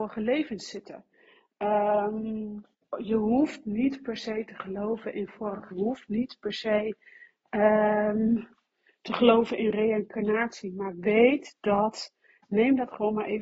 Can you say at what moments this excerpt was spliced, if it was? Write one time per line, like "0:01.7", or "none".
0:02.7
0:05.7